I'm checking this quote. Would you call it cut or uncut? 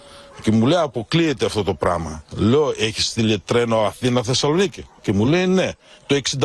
uncut